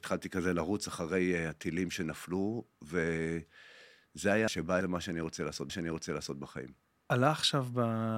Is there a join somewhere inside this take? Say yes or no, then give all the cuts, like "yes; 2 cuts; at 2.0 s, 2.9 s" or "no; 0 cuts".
yes; 3 cuts; at 4.5 s, 4.8 s, 5.7 s